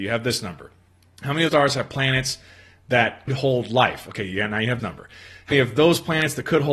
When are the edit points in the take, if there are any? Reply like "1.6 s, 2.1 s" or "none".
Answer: 1.5 s, 3.3 s, 4.8 s, 5.5 s